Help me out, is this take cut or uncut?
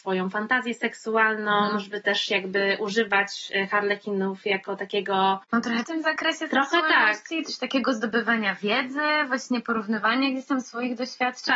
cut